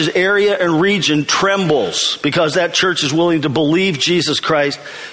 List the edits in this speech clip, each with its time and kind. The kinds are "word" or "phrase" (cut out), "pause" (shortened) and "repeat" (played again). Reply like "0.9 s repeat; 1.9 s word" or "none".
none